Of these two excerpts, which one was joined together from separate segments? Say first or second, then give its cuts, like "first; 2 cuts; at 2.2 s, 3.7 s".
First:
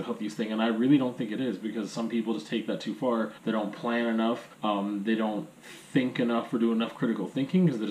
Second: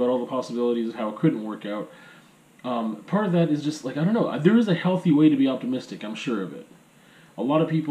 first; 2 cuts; at 3.4 s, 4.5 s